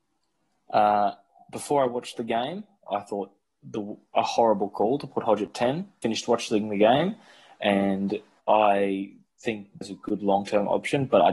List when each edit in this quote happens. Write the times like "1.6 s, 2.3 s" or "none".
6.0 s, 8.4 s, 9.8 s

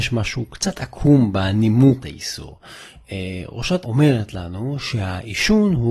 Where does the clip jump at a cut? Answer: 2.0 s, 3.8 s

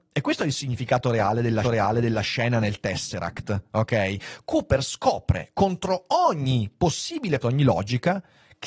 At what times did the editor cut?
1.6 s, 7.4 s

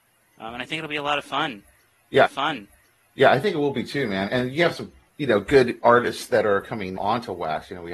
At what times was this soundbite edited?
2.2 s, 4.3 s, 7.0 s

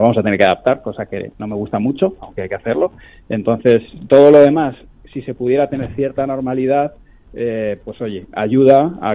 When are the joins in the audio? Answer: none

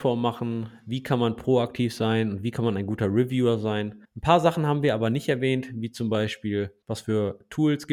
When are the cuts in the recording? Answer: 4.0 s, 6.8 s

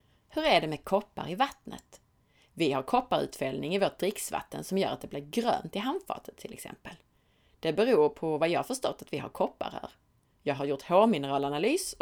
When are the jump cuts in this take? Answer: none

